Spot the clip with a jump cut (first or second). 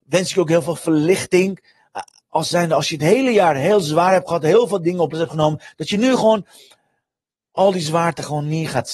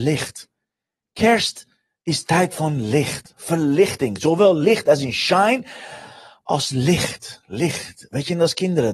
first